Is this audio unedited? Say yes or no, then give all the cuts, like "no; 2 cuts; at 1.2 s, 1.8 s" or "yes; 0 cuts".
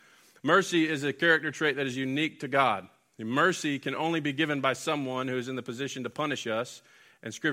yes; 0 cuts